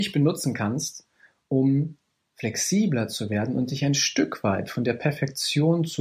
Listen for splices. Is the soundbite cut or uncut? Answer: uncut